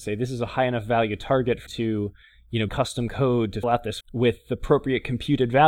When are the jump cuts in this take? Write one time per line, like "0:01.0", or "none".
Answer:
0:01.7
0:02.7
0:03.6
0:04.0